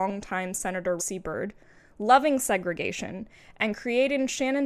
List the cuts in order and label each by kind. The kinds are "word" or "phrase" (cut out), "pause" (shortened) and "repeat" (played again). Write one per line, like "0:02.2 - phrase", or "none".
0:01.0 - word